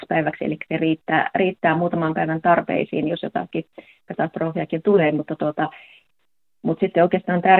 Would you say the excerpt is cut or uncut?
uncut